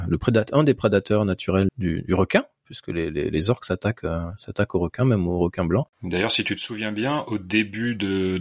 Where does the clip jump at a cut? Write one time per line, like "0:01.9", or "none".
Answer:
0:01.7